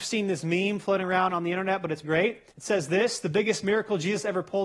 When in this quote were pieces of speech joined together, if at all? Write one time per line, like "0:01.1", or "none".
0:02.0
0:02.5